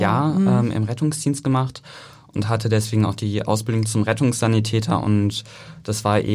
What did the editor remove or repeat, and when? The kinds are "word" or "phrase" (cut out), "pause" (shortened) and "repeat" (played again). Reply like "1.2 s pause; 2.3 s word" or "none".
none